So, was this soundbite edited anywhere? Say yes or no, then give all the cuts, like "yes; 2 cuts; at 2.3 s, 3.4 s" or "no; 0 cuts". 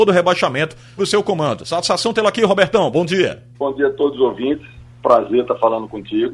yes; 2 cuts; at 1.0 s, 3.5 s